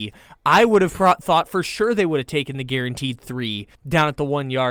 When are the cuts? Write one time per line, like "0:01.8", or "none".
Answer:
0:03.7